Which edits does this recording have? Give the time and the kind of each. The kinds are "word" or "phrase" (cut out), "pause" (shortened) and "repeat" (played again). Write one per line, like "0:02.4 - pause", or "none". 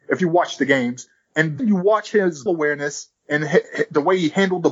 0:01.6 - word
0:02.5 - word
0:03.2 - pause